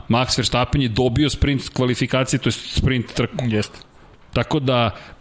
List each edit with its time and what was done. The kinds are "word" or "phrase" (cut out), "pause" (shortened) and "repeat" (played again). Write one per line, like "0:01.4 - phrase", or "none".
none